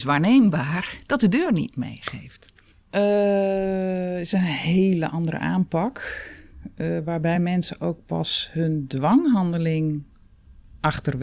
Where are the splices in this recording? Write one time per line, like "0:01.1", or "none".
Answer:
none